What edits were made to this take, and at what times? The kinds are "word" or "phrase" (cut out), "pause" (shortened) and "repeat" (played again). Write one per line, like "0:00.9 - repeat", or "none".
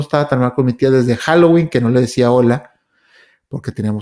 none